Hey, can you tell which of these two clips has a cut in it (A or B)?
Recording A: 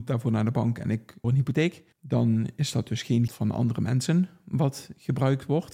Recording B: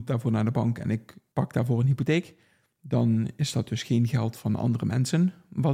A